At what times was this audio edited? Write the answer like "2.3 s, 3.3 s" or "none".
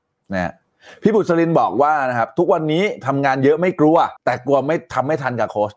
4.2 s